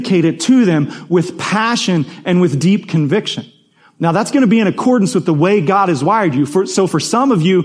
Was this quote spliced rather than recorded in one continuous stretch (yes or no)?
no